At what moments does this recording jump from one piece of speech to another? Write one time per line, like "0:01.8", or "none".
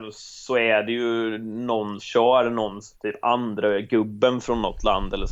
0:02.0
0:02.9

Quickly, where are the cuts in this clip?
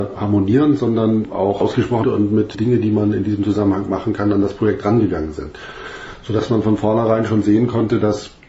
0:02.0
0:02.5

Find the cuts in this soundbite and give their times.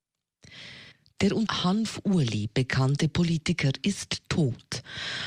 0:00.9
0:01.5

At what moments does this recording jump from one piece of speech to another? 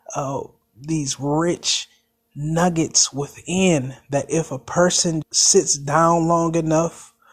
0:05.2

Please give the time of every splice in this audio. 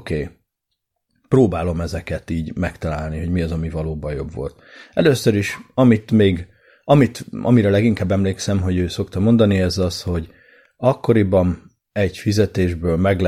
0:11.8

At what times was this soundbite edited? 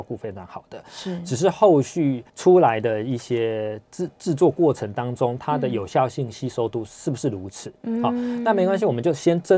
0:02.3

